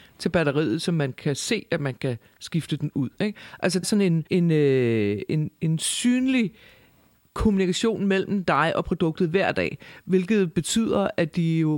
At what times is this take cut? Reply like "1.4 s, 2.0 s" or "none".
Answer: 3.8 s, 4.3 s, 5.6 s